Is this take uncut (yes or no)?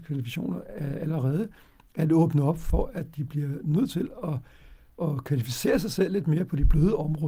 yes